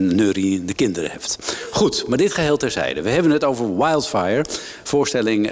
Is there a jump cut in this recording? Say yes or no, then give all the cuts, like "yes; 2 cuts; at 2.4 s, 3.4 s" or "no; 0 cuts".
no; 0 cuts